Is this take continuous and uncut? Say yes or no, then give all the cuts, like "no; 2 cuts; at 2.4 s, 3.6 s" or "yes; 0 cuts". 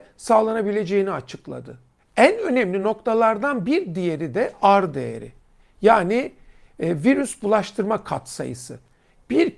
yes; 0 cuts